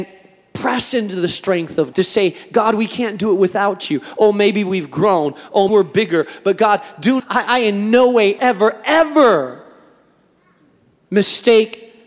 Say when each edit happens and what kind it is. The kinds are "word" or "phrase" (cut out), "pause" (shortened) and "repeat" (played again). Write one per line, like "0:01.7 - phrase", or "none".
0:01.9 - word
0:05.7 - word
0:07.2 - word
0:08.4 - word